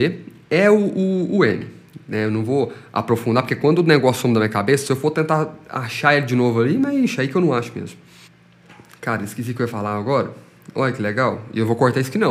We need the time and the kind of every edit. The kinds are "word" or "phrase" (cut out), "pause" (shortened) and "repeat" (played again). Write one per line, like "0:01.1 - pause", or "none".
0:08.3 - pause